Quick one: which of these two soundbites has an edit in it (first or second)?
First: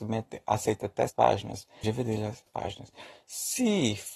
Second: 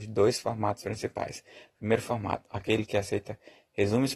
first